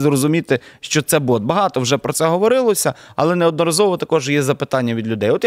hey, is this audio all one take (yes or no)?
yes